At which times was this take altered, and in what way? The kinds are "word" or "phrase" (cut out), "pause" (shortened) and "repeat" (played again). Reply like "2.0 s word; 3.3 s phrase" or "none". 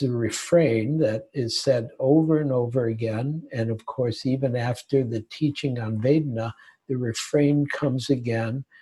none